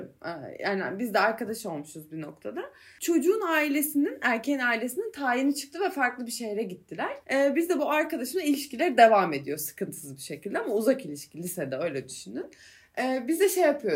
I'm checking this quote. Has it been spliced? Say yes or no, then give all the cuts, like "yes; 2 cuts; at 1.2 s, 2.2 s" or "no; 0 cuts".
no; 0 cuts